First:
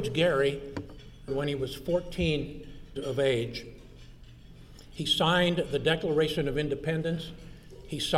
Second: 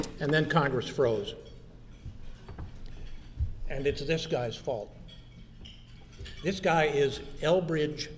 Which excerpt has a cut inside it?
first; 2 cuts; at 1.3 s, 3.0 s

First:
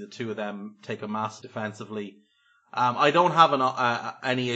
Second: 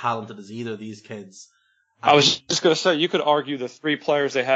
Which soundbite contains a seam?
first; 1 cut; at 1.4 s

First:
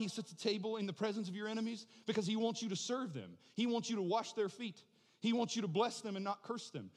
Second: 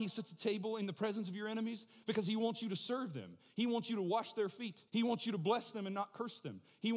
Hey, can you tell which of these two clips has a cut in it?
second; 1 cut; at 4.9 s

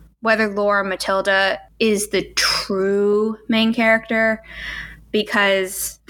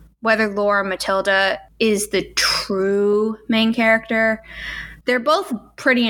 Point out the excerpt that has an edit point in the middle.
second; 1 cut; at 5.0 s

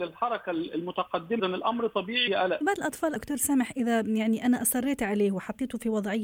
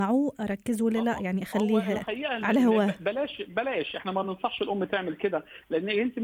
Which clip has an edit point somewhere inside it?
first; 4 cuts; at 1.4 s, 2.3 s, 2.6 s, 3.2 s

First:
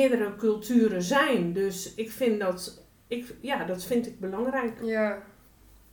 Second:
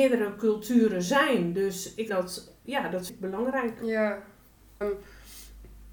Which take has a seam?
second; 4 cuts; at 2.1 s, 2.6 s, 3.1 s, 4.8 s

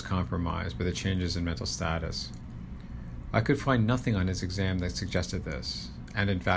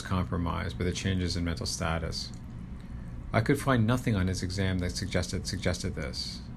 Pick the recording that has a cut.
second; 1 cut; at 5.4 s

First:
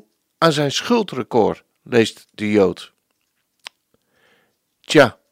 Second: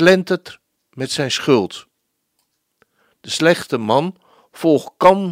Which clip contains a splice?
first; 1 cut; at 1.7 s

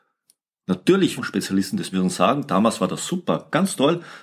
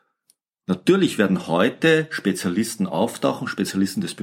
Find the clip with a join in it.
first; 2 cuts; at 1.2 s, 1.9 s

